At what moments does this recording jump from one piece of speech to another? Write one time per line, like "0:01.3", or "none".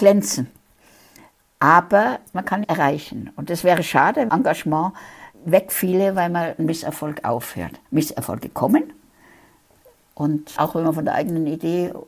0:02.6
0:04.3
0:05.3
0:06.6
0:07.9
0:10.6

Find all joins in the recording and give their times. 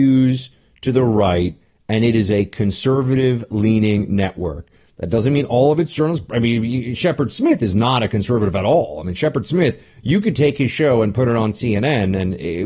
none

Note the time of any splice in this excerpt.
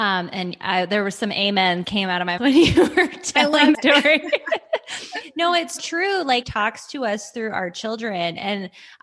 0:01.8
0:02.4
0:03.7
0:05.8
0:06.4

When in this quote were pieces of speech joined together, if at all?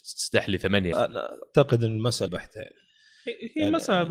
0:00.9
0:02.3

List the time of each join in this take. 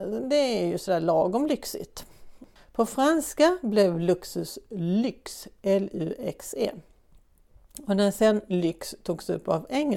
none

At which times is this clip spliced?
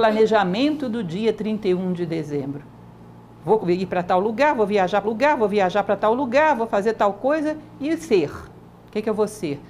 0:03.6
0:05.0

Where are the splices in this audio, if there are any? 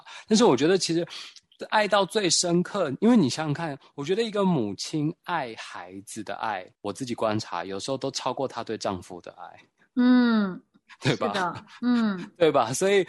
0:06.7

